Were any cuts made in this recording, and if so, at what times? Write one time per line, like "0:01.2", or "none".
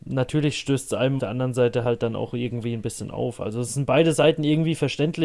0:01.2